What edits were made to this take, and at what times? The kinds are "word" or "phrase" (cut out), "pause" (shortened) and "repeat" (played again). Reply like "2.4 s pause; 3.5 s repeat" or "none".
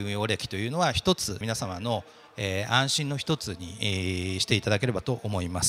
1.4 s phrase